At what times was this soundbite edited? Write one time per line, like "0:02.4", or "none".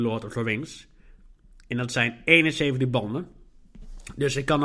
none